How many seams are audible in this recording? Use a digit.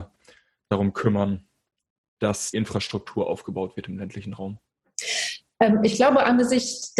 1